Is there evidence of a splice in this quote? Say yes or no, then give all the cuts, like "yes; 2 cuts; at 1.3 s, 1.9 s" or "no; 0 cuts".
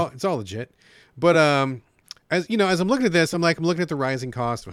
no; 0 cuts